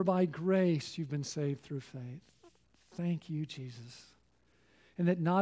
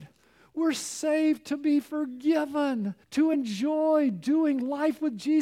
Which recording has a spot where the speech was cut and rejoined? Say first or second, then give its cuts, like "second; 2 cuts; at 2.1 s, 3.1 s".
second; 1 cut; at 3.0 s